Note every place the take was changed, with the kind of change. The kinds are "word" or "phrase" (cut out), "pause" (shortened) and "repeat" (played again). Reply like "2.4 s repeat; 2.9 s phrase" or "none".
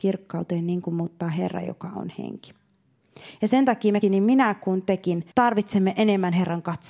4.0 s word; 5.3 s pause